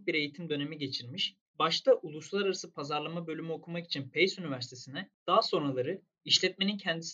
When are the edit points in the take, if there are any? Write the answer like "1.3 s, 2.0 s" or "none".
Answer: 1.5 s